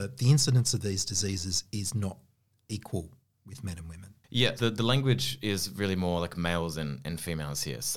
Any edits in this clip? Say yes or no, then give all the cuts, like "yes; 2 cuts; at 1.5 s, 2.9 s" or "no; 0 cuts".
yes; 1 cut; at 4.6 s